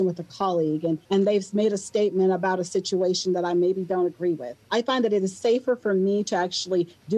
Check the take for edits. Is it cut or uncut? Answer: cut